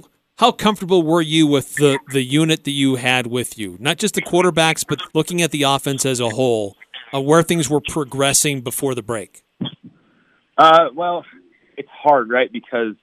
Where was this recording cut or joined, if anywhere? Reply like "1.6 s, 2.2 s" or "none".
5.1 s